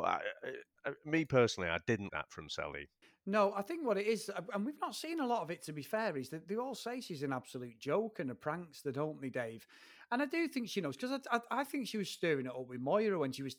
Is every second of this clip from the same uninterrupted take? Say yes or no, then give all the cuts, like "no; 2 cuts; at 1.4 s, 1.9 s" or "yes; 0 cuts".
no; 2 cuts; at 2.1 s, 3.0 s